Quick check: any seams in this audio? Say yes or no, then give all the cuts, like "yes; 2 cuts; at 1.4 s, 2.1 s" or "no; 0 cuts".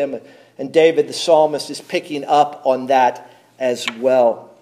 no; 0 cuts